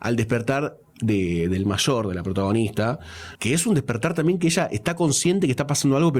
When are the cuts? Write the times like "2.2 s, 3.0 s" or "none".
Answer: none

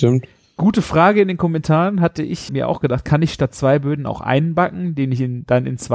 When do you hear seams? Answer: 2.5 s

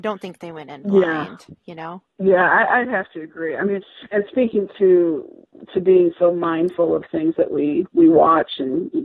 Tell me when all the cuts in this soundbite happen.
2.1 s

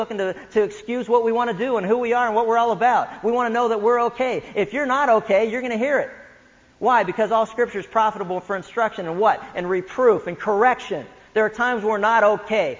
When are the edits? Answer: none

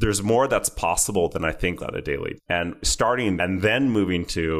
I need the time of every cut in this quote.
1.8 s, 2.4 s, 3.4 s

